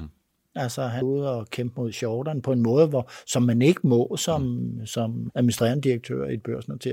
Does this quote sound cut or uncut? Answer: cut